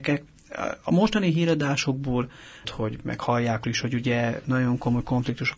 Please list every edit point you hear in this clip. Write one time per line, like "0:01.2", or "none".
0:02.6
0:03.6